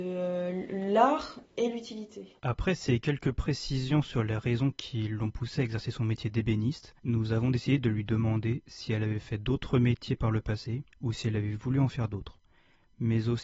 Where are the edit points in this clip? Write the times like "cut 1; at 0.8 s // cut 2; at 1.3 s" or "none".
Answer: cut 1; at 1.4 s // cut 2; at 2.4 s // cut 3; at 7.0 s // cut 4; at 10.9 s